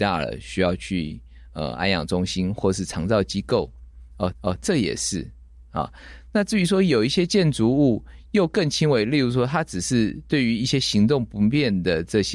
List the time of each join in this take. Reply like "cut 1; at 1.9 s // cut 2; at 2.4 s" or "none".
cut 1; at 4.3 s